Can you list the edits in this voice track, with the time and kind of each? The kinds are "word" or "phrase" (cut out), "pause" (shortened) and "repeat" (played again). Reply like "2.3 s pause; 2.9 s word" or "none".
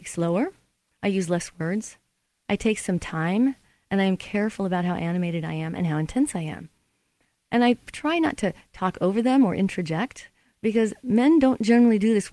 none